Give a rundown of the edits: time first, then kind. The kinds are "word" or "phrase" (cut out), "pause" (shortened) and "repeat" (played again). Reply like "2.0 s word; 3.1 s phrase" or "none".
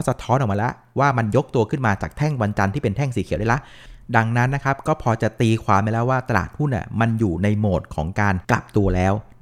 8.4 s pause